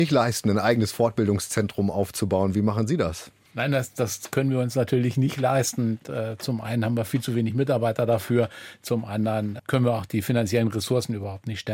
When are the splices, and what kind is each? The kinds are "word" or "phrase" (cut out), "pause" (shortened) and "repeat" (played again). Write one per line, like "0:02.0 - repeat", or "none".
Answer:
0:03.5 - pause
0:09.6 - word